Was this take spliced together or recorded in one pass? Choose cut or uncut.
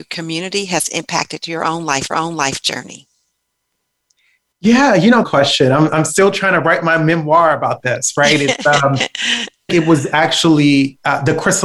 cut